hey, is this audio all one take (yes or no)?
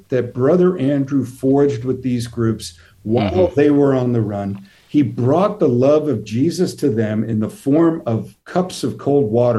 yes